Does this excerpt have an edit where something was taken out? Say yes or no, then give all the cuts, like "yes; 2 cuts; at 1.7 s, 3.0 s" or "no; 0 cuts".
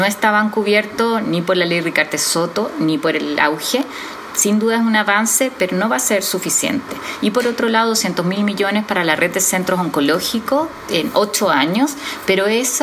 no; 0 cuts